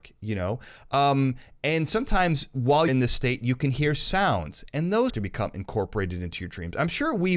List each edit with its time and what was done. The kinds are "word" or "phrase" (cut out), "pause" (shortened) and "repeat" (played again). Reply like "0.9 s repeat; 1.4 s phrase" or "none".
2.9 s word; 5.1 s word